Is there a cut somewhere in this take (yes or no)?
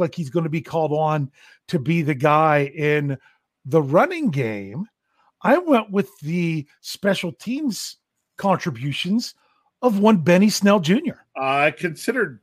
no